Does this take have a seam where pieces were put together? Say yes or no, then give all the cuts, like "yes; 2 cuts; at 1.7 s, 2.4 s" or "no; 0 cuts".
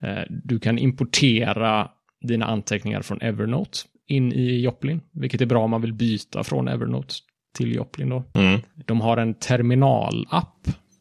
no; 0 cuts